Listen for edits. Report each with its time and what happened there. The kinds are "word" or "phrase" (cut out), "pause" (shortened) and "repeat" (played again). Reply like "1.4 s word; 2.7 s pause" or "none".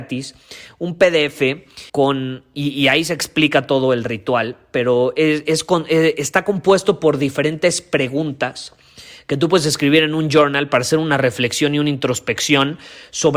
1.9 s pause